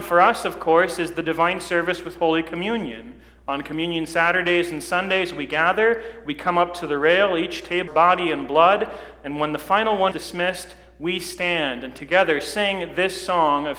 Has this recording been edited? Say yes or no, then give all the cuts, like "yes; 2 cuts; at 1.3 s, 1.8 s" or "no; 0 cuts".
yes; 2 cuts; at 7.9 s, 10.1 s